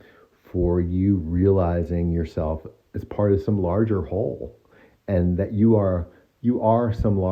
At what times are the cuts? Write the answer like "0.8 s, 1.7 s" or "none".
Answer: none